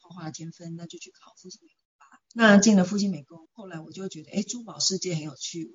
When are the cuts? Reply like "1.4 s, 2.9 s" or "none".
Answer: 2.2 s, 3.4 s